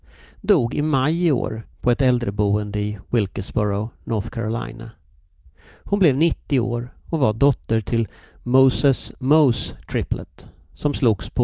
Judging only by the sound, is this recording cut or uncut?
uncut